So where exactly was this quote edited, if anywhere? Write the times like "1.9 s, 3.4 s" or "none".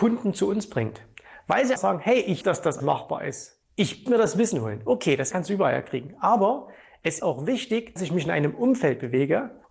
1.8 s, 2.4 s, 2.8 s, 4.1 s, 5.3 s, 7.2 s, 8.0 s